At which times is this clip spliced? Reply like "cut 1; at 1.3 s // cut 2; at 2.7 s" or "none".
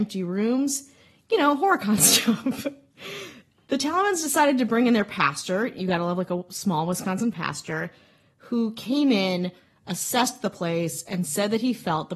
none